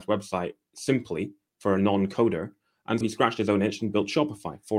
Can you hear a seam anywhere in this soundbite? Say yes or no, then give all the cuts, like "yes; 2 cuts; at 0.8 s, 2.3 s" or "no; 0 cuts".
yes; 1 cut; at 3.0 s